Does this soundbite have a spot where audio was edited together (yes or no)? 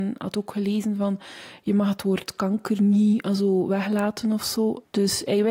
no